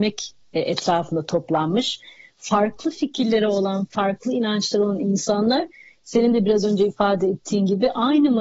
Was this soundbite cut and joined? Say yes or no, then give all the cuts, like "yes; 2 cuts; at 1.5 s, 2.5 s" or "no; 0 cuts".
no; 0 cuts